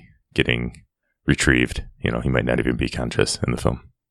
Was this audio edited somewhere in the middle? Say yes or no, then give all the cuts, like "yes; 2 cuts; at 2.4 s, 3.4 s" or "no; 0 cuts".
no; 0 cuts